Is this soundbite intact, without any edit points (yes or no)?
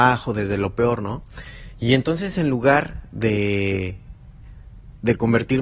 yes